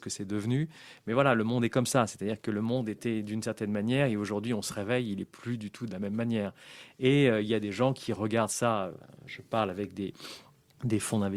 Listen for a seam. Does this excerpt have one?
no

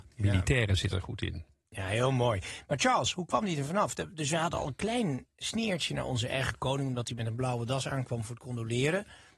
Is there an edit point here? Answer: no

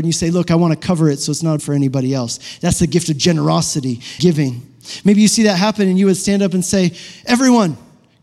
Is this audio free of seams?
no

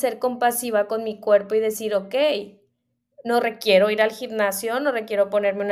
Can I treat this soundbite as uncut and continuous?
yes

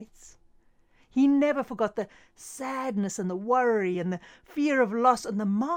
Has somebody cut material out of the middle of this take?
no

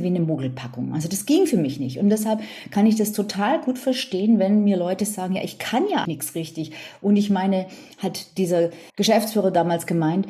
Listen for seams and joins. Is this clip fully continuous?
no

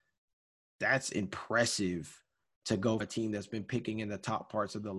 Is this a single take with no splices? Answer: no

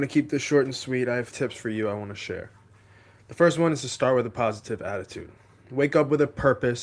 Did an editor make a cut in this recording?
yes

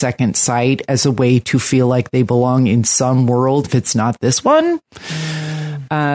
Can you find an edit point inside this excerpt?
yes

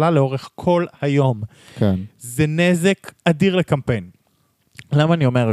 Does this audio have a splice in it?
no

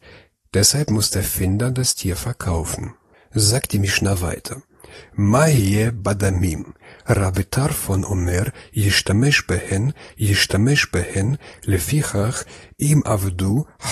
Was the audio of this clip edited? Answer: yes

